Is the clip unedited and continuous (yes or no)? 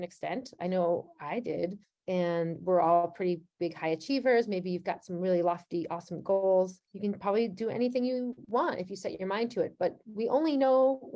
no